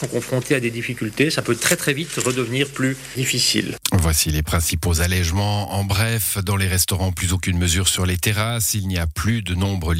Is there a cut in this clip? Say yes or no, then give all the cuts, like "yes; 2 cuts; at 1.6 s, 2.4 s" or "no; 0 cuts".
no; 0 cuts